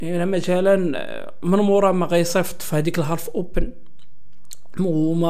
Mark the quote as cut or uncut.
uncut